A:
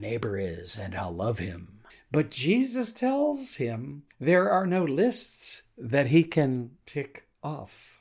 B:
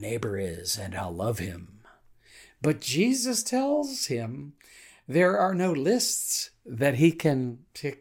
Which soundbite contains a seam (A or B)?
A